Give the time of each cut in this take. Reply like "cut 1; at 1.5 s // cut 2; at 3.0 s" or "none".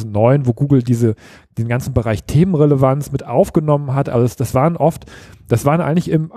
none